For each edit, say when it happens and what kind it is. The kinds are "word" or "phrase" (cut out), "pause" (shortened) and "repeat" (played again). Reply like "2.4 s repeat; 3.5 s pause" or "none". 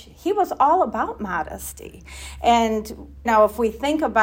3.2 s word